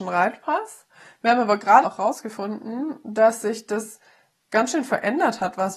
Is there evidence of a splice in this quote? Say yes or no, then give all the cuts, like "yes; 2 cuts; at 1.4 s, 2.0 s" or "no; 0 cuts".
yes; 1 cut; at 1.8 s